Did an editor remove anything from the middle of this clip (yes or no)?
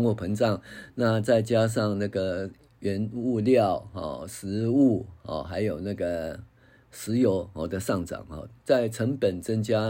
no